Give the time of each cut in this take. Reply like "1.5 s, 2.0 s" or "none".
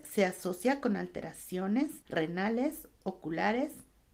2.0 s